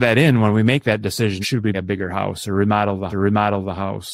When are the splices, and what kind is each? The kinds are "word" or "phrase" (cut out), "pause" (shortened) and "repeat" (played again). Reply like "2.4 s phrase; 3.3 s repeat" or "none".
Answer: 1.4 s word; 1.7 s word; 3.1 s repeat

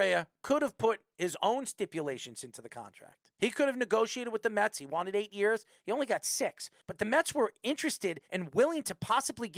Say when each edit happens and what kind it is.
8.2 s pause

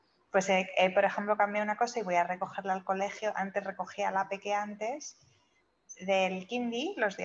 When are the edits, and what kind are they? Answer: none

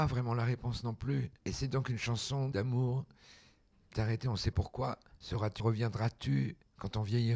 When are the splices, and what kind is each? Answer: 2.5 s word; 3.9 s word; 4.5 s word; 5.6 s word

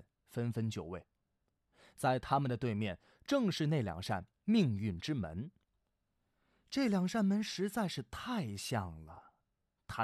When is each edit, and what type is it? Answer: none

